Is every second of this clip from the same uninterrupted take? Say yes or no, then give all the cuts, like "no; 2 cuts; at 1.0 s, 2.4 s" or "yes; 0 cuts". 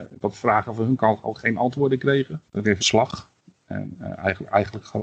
no; 2 cuts; at 2.5 s, 2.8 s